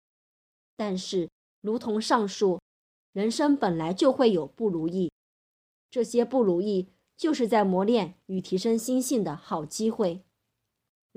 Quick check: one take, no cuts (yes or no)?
yes